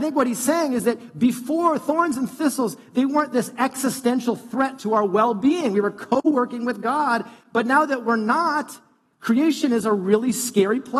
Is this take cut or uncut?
uncut